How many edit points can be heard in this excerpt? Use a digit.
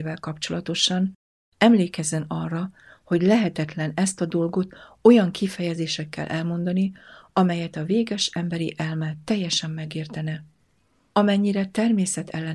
0